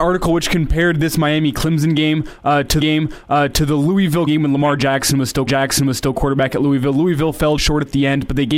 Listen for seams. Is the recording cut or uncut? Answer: cut